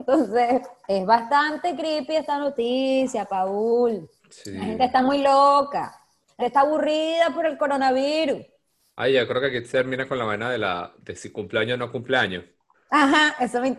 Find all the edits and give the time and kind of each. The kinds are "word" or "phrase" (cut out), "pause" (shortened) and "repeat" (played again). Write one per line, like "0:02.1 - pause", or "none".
0:04.2 - pause
0:06.4 - word